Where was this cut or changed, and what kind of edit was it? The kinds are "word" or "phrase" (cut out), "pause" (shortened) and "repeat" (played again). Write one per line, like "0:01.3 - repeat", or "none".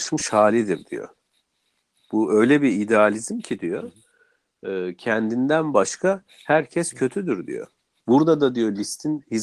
none